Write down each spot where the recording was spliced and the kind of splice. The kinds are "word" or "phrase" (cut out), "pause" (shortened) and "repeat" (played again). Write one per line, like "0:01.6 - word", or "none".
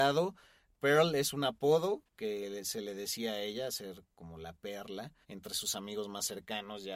0:02.1 - pause
0:05.2 - pause